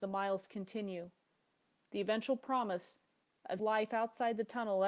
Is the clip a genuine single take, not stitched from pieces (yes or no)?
no